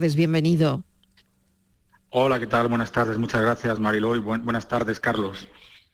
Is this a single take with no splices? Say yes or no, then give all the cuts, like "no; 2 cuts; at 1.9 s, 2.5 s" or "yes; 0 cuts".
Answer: yes; 0 cuts